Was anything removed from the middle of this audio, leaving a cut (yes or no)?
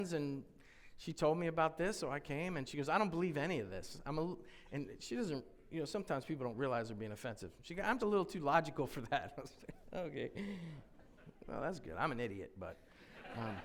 yes